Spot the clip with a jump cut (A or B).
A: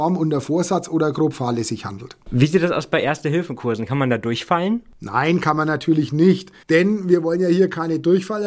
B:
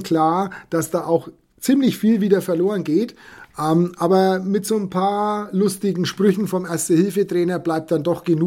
A